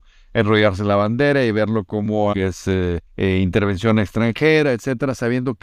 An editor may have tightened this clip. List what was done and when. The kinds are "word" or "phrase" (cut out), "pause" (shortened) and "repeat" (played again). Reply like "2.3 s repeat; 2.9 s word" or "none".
2.3 s word; 3.1 s pause